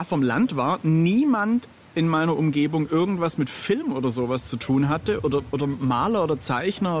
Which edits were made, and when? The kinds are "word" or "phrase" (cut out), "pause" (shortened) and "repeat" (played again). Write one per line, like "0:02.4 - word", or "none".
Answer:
0:05.2 - word